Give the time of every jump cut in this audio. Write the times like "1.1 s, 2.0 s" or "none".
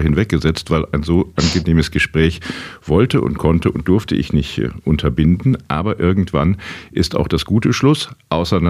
none